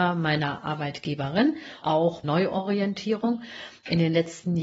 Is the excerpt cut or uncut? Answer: cut